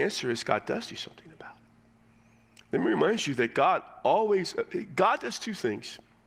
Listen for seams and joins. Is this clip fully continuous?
yes; 0 cuts

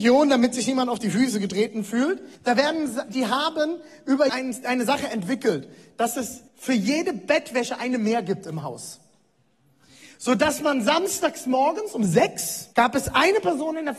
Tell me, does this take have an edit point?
yes; 4 cuts; at 2.4 s, 4.3 s, 6.5 s, 12.7 s

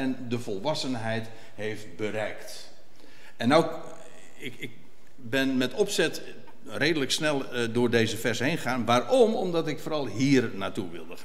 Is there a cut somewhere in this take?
no; 0 cuts

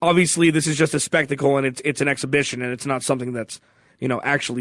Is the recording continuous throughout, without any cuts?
yes; 0 cuts

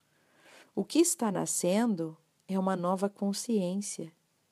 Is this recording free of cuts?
yes; 0 cuts

